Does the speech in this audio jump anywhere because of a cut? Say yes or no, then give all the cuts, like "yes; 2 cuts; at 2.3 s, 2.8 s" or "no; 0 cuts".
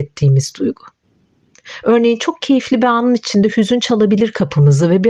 no; 0 cuts